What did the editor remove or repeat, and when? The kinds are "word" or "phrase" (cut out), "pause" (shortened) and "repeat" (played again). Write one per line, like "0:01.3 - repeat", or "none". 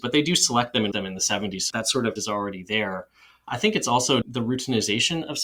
0:00.9 - word
0:01.7 - word
0:02.2 - word
0:04.2 - word